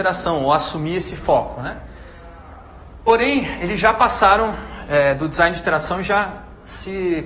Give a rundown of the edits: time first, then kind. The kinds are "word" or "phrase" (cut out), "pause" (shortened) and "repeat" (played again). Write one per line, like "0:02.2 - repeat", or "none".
none

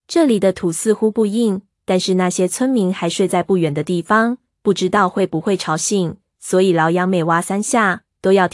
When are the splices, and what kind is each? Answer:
none

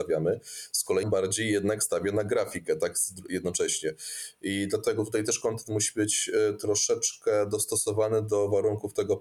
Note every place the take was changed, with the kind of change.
0:01.0 - word

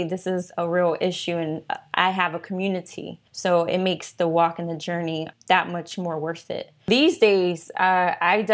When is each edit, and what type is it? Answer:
0:03.3 - pause

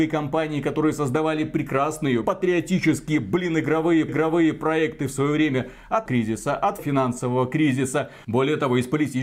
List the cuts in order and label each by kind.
0:02.2 - phrase
0:04.1 - repeat
0:06.1 - phrase
0:06.8 - word

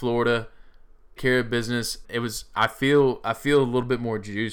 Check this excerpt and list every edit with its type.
0:01.2 - word
0:02.0 - phrase

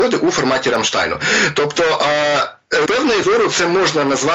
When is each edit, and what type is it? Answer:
0:02.9 - word
0:03.2 - word

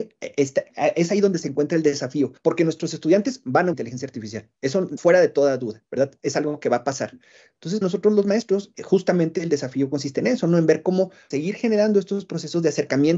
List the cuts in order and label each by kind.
0:02.4 - pause
0:03.7 - phrase
0:05.0 - word
0:05.9 - pause
0:07.8 - word
0:08.7 - word
0:11.3 - word

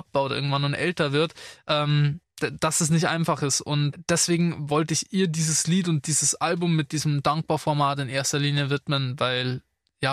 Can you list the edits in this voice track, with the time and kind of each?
none

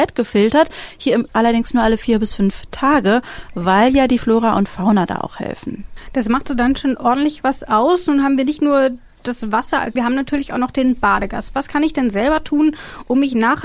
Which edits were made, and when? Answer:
0:01.3 - word
0:06.5 - word
0:10.0 - phrase

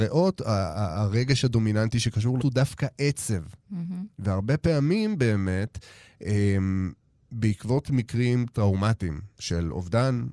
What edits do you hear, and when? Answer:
0:02.4 - word

